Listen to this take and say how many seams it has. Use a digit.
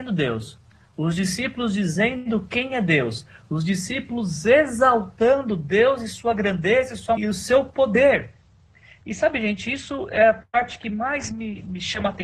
1